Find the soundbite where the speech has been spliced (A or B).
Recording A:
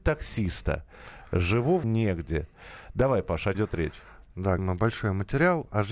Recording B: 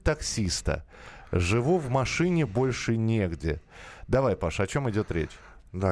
A